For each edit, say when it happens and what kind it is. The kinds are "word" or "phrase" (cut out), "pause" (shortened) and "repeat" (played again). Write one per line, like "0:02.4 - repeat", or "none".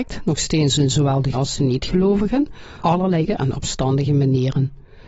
0:01.3 - word
0:02.8 - word
0:03.3 - word